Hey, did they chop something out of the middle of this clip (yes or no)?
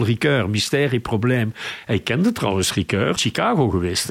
yes